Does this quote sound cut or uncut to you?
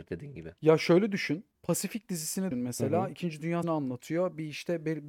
cut